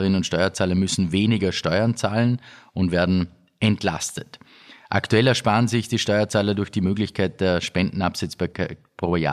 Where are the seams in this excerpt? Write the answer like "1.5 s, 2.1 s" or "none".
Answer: none